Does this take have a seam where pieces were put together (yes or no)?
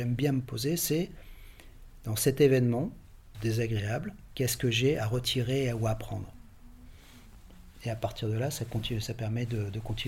yes